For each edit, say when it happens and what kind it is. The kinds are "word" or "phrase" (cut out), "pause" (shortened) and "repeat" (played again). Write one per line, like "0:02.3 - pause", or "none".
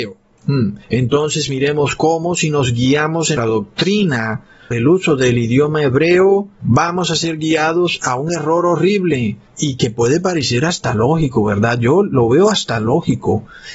0:03.4 - word
0:04.7 - word